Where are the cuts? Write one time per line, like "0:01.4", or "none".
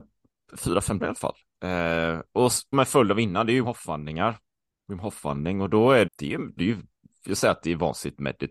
0:01.0
0:02.7
0:03.6
0:06.1
0:06.6
0:07.3

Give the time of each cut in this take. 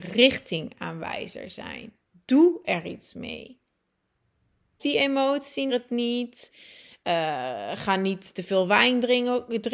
0:04.8
0:05.7

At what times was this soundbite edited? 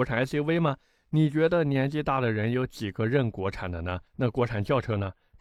0:04.1

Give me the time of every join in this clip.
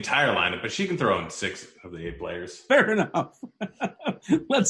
none

